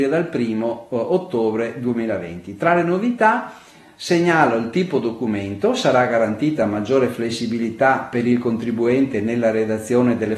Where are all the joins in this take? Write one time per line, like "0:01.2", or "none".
none